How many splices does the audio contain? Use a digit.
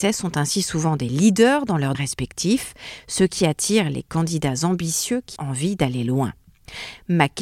2